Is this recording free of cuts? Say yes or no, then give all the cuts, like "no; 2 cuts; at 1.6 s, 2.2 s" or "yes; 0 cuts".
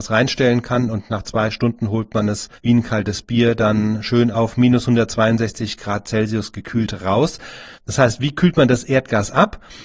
no; 2 cuts; at 2.6 s, 7.7 s